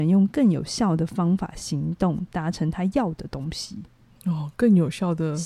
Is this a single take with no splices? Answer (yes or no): yes